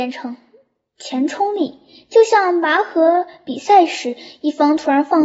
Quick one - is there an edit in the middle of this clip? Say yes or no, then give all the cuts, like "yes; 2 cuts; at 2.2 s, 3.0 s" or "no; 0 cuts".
no; 0 cuts